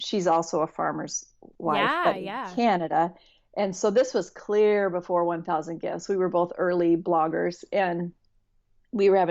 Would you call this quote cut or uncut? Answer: uncut